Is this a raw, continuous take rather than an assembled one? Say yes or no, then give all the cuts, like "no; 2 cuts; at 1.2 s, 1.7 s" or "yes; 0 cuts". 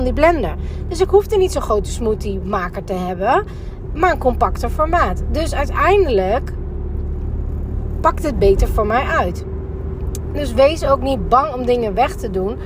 yes; 0 cuts